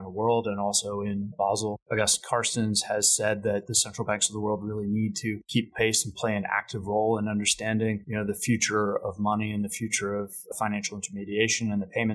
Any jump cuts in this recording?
yes; 1 cut; at 10.5 s

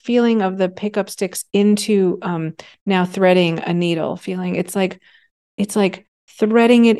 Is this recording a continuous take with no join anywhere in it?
yes; 0 cuts

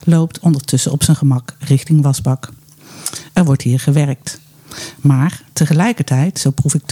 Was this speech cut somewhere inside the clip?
no; 0 cuts

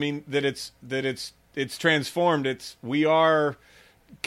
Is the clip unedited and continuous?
yes; 0 cuts

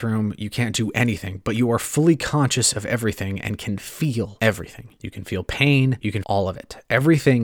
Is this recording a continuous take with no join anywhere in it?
no; 1 cut; at 6.2 s

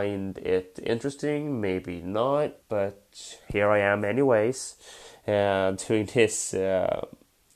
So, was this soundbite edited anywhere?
yes; 1 cut; at 2.6 s

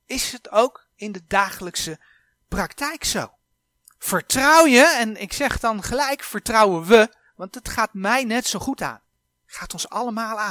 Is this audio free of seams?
yes; 0 cuts

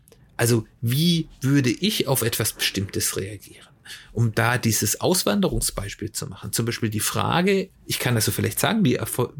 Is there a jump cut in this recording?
yes; 1 cut; at 7.8 s

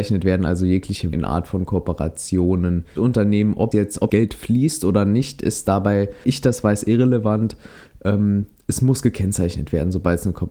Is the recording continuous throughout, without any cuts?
no; 5 cuts; at 1.1 s, 3.0 s, 3.7 s, 4.1 s, 6.2 s

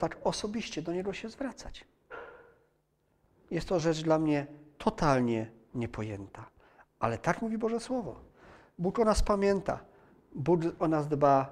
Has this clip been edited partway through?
no; 0 cuts

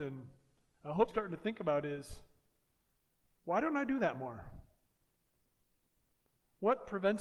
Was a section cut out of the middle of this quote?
yes; 1 cut; at 1.1 s

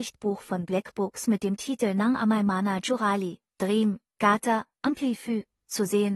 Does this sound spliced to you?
no; 0 cuts

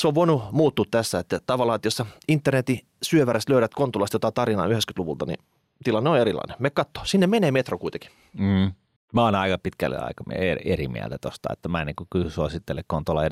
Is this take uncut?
yes; 0 cuts

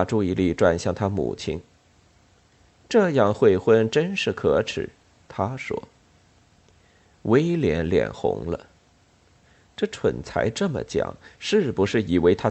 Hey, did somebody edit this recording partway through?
no; 0 cuts

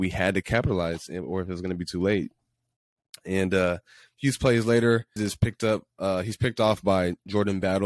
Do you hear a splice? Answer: yes; 1 cut; at 5.2 s

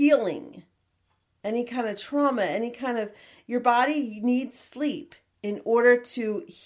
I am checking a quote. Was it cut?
no; 0 cuts

